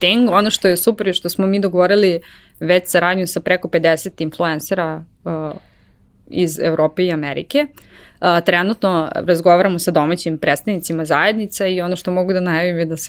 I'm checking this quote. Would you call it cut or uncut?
uncut